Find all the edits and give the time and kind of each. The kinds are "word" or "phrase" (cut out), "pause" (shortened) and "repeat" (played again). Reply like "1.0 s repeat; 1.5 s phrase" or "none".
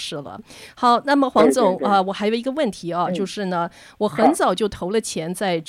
none